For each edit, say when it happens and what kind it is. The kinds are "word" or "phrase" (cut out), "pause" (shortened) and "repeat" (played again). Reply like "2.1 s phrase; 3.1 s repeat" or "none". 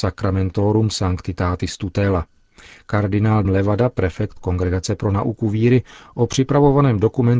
3.4 s word